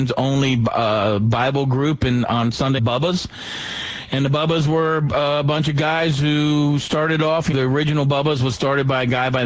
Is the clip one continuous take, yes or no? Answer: no